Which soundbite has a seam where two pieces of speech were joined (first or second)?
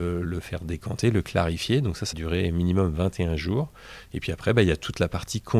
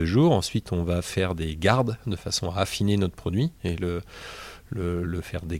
first